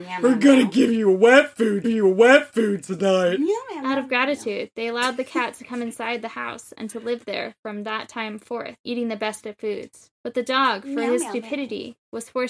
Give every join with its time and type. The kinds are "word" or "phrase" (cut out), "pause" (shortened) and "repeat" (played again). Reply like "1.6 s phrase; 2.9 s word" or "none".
1.8 s repeat; 8.8 s pause; 10.1 s pause